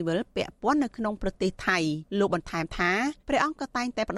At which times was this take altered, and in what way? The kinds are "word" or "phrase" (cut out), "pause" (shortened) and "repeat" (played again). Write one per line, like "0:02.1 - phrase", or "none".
0:02.1 - pause
0:03.2 - pause